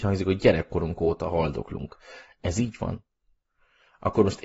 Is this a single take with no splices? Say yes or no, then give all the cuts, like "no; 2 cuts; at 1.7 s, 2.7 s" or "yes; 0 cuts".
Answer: yes; 0 cuts